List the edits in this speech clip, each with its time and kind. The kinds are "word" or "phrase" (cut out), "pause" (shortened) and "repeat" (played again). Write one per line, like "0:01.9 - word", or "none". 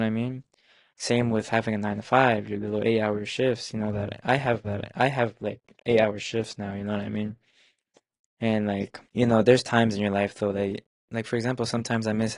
0:04.6 - repeat
0:09.0 - pause